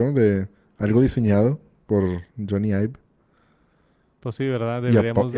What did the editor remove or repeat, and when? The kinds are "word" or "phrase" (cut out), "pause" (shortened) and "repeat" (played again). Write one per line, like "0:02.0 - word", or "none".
none